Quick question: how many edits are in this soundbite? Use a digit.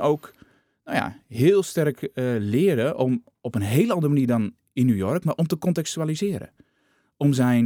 0